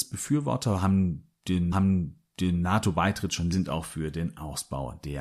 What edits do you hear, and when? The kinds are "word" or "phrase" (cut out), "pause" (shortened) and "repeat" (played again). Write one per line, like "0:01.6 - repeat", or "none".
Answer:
0:01.7 - repeat
0:03.5 - phrase